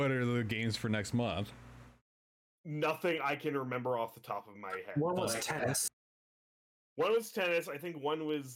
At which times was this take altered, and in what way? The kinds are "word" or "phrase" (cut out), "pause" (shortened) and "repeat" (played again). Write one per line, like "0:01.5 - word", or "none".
none